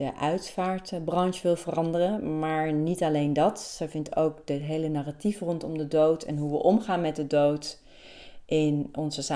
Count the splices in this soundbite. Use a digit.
0